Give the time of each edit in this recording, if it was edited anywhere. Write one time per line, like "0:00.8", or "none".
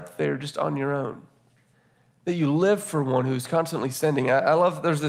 0:01.7